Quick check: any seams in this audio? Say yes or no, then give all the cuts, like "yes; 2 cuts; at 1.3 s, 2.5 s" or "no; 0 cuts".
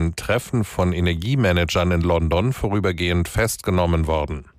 no; 0 cuts